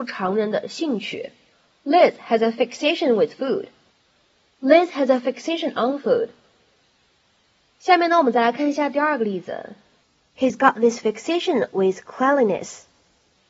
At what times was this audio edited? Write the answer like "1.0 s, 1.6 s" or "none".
none